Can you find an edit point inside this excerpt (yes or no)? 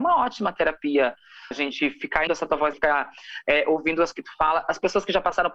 yes